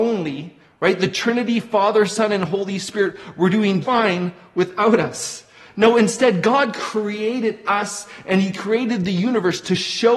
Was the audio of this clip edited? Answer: yes; 1 cut; at 3.8 s

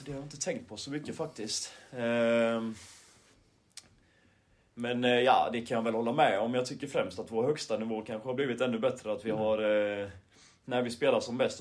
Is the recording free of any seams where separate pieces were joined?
yes; 0 cuts

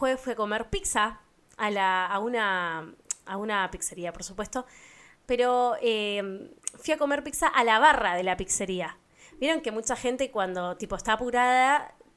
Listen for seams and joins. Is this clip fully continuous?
yes; 0 cuts

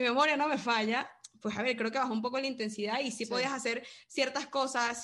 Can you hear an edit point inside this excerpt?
no; 0 cuts

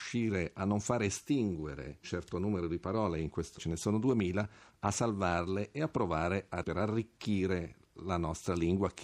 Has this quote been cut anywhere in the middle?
yes; 3 cuts; at 2.0 s, 3.6 s, 6.6 s

